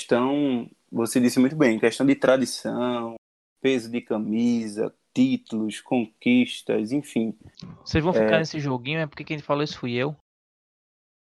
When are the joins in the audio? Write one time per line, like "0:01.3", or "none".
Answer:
none